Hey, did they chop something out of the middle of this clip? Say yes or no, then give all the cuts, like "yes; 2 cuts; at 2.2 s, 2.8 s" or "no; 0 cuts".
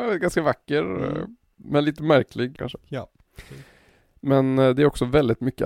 yes; 1 cut; at 2.6 s